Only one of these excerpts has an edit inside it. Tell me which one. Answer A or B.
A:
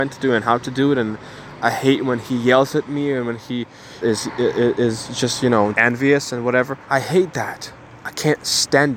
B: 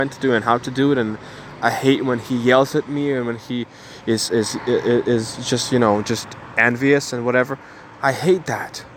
A